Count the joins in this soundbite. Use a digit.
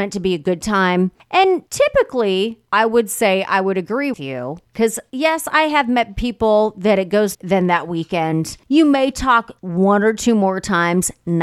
3